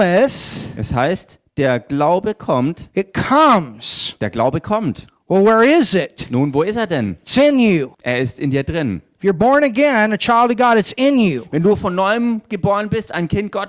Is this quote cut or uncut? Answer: cut